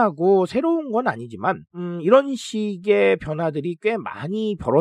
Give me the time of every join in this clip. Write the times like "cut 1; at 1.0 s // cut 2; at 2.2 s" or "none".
cut 1; at 1.7 s

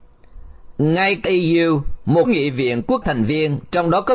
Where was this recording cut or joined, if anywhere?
cut 1; at 1.2 s // cut 2; at 2.2 s // cut 3; at 3.0 s

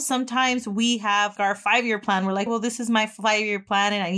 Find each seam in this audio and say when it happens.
cut 1; at 1.4 s // cut 2; at 2.5 s

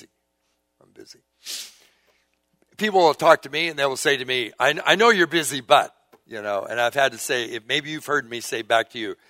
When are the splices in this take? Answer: none

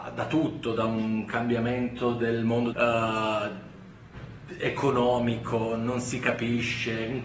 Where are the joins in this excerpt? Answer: cut 1; at 2.7 s

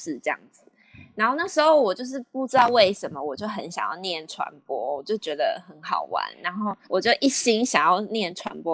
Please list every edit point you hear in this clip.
cut 1; at 6.8 s

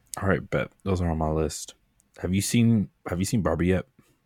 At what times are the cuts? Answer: cut 1; at 3.0 s

